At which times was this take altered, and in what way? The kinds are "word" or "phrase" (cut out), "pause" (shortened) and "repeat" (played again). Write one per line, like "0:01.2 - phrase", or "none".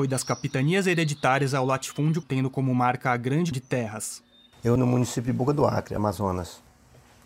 0:02.2 - word
0:03.5 - word
0:04.8 - word